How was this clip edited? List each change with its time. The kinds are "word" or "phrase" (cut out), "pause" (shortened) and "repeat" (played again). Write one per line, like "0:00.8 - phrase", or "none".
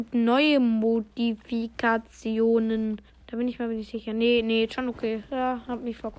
0:03.1 - pause